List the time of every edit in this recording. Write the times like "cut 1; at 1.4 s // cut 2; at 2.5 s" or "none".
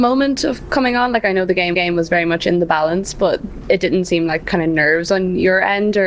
cut 1; at 1.7 s // cut 2; at 4.4 s